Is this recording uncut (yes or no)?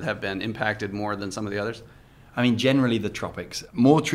yes